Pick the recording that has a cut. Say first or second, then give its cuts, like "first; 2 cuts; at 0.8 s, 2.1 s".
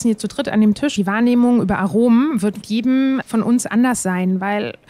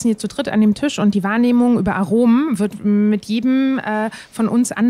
first; 3 cuts; at 1.0 s, 2.6 s, 3.2 s